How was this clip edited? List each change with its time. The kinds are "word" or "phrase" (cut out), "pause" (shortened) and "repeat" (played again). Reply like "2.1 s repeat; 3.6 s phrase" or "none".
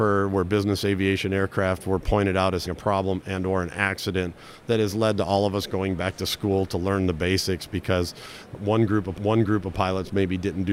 2.6 s word; 9.2 s repeat